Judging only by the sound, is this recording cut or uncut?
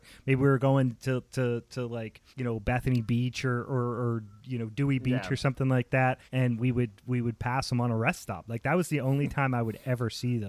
cut